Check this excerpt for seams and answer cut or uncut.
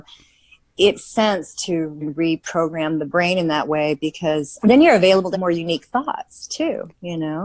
cut